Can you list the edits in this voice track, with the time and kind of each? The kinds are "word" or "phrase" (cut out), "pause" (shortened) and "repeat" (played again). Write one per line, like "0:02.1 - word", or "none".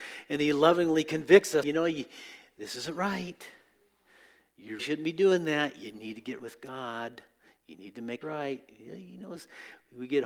0:01.6 - word
0:04.8 - word
0:06.4 - word
0:08.2 - word